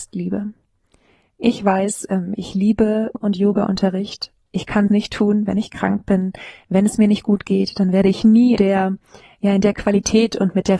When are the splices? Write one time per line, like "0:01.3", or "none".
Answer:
0:03.1
0:04.5
0:04.9
0:08.6